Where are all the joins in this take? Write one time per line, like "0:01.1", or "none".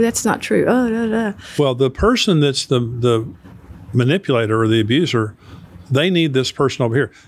none

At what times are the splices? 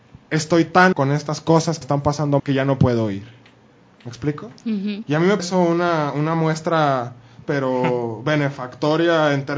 0:00.9
0:01.8
0:02.4
0:05.4
0:07.4

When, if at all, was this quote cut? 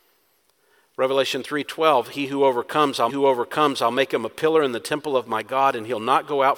0:03.1

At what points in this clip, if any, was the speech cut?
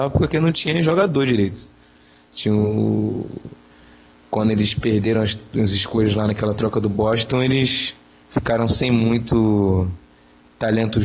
none

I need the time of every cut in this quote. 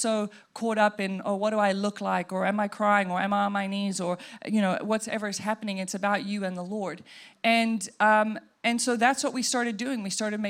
none

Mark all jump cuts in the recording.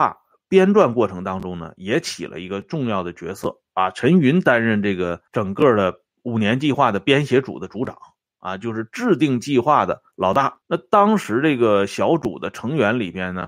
0:05.3
0:06.1
0:10.1
0:10.6

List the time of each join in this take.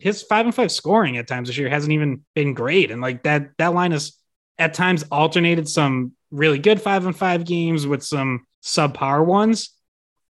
0:02.3
0:04.3
0:08.5

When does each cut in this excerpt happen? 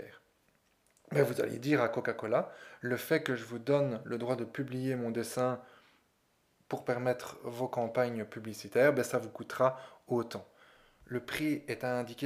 none

